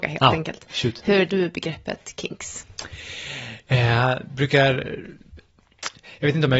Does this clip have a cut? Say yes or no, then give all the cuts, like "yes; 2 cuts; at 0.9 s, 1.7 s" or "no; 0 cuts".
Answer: yes; 1 cut; at 1.3 s